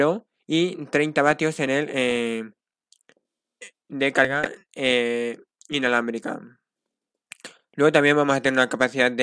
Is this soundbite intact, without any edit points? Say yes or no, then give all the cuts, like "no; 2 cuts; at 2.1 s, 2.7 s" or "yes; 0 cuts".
yes; 0 cuts